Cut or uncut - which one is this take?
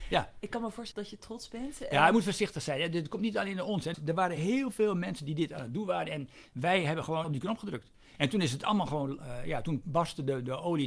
uncut